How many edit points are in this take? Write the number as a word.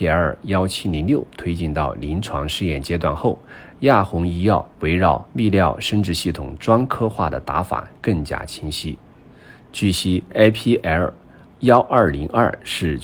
three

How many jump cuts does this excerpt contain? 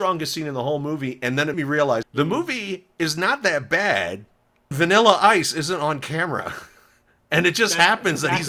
three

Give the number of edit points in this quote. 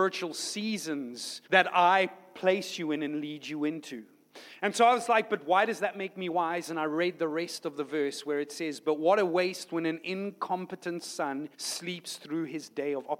two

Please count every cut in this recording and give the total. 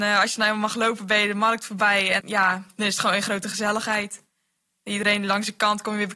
one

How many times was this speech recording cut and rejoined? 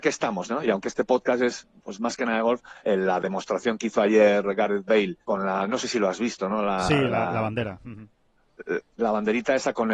three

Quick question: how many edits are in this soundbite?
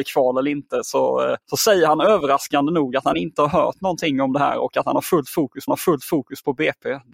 two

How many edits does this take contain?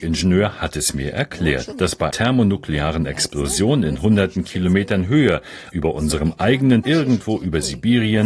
three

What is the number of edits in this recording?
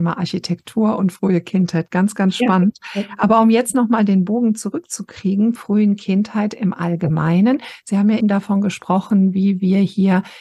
two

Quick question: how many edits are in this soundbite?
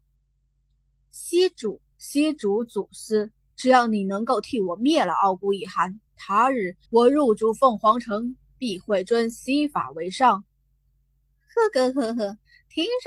four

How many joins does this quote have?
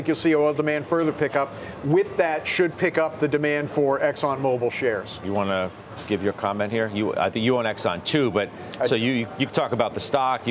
zero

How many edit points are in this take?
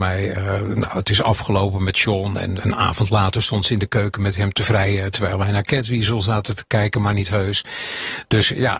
one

